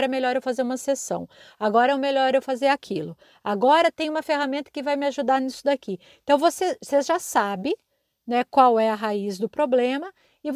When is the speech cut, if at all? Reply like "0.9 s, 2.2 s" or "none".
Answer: none